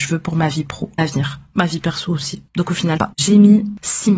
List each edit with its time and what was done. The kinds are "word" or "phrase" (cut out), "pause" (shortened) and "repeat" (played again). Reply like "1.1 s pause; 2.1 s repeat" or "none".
1.0 s word; 3.0 s phrase